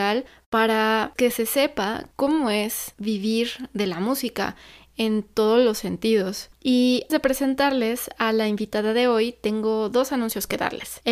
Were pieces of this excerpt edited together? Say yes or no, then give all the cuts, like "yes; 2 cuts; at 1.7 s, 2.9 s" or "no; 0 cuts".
yes; 2 cuts; at 1.2 s, 7.1 s